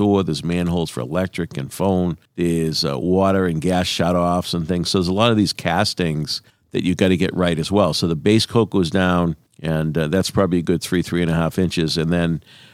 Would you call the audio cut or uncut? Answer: cut